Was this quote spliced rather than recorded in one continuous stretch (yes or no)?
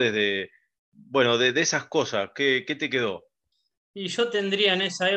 yes